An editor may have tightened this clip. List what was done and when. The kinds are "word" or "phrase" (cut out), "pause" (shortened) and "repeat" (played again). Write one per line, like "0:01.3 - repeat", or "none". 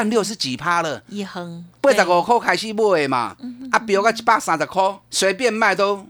0:05.0 - pause

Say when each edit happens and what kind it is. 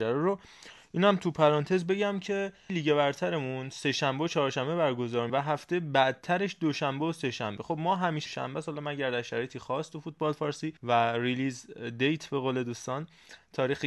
0:02.7 - phrase
0:05.3 - word
0:08.3 - word
0:10.8 - pause

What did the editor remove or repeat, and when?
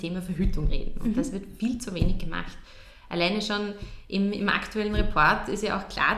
none

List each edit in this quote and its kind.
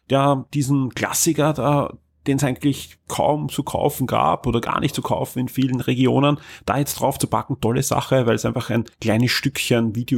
0:08.9 - pause

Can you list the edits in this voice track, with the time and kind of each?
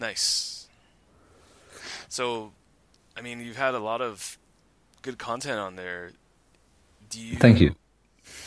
0:02.0 - pause

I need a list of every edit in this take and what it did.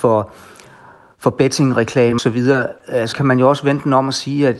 0:02.2 - word
0:03.1 - word

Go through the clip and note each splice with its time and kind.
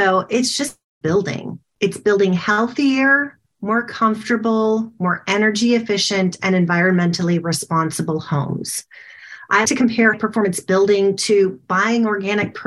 0:01.0 - phrase
0:09.7 - word
0:10.1 - word

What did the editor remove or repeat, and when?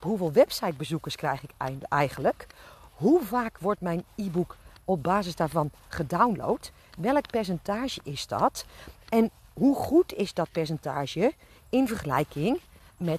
none

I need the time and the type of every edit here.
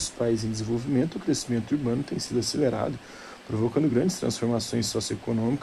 none

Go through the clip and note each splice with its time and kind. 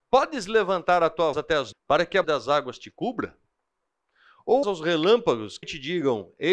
0:01.3 - word
0:01.7 - word
0:02.2 - word
0:04.6 - word
0:05.6 - word

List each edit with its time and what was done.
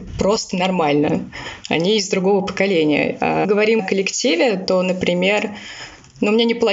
0:03.4 - phrase
0:03.8 - word

